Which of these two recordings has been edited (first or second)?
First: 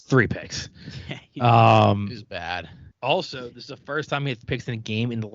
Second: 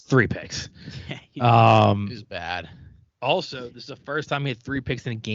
first